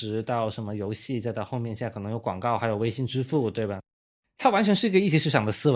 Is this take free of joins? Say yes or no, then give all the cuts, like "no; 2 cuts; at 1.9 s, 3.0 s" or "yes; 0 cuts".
yes; 0 cuts